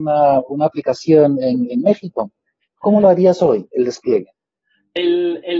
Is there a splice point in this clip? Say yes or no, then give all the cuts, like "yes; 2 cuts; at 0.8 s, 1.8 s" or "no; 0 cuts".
no; 0 cuts